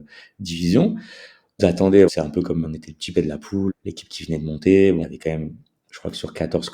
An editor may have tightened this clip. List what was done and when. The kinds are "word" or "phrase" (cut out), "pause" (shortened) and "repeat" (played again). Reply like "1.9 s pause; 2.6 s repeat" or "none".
1.6 s word; 2.1 s word; 2.6 s word; 3.1 s word; 3.7 s word; 5.0 s word